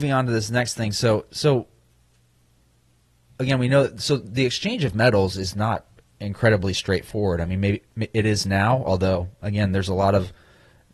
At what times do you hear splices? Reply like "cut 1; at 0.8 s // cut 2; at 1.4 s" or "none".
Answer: none